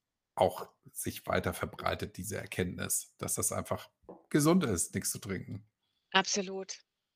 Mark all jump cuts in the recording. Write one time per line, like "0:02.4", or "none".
none